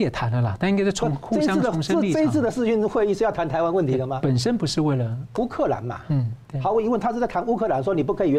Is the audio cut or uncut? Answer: uncut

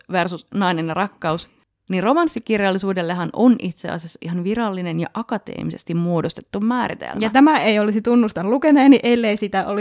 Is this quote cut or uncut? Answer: uncut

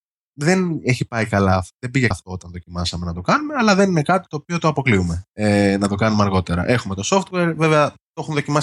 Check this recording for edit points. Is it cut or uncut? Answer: cut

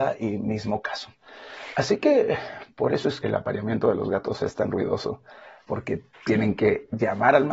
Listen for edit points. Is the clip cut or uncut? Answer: cut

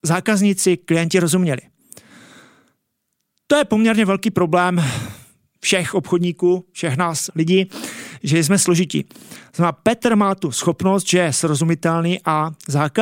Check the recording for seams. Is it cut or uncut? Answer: cut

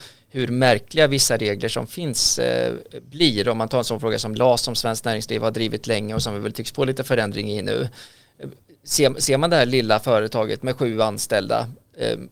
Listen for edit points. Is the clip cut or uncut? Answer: uncut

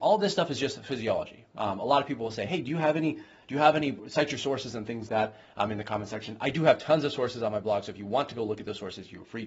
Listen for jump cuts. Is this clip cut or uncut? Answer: cut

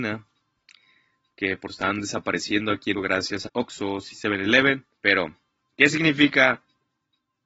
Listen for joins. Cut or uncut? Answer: cut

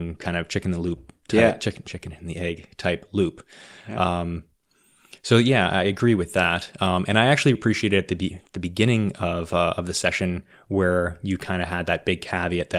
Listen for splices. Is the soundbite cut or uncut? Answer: cut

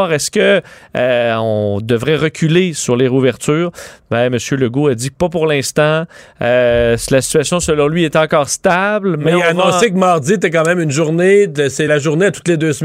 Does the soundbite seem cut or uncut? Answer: cut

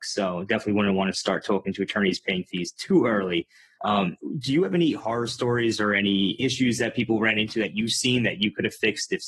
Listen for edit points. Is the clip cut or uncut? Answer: uncut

